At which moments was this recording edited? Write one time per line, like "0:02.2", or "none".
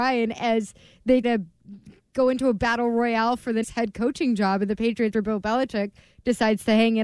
0:01.2
0:03.6
0:05.1